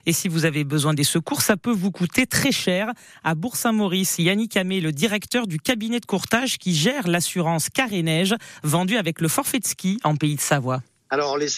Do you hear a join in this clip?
no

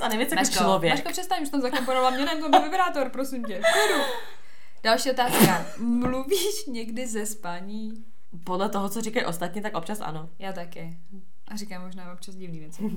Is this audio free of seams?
yes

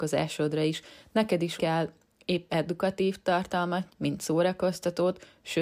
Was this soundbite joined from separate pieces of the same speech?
yes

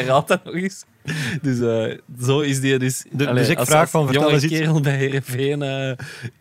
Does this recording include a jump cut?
no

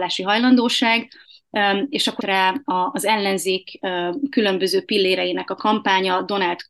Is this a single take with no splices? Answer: no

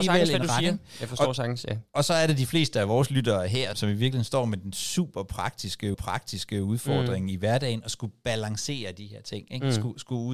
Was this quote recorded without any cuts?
no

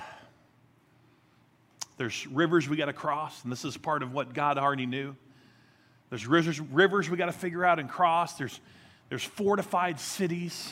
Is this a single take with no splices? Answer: yes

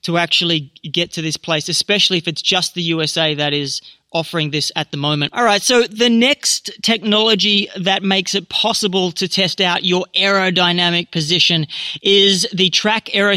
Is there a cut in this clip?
no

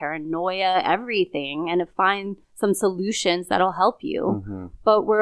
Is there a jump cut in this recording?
yes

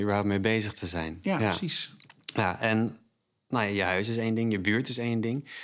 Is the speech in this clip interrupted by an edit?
no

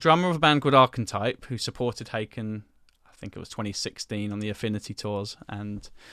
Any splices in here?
no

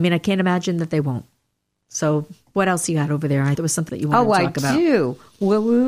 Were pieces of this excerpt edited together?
yes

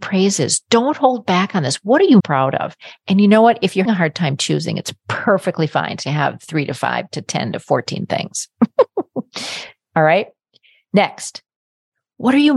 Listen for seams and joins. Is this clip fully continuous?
no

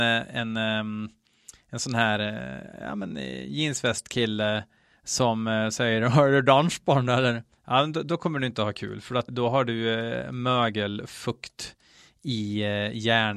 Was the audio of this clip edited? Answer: yes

